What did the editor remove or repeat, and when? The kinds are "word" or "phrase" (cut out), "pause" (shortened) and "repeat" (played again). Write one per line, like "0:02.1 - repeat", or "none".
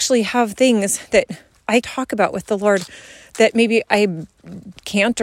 0:01.8 - word